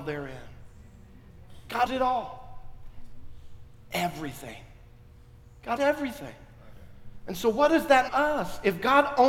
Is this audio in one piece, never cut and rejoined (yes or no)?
no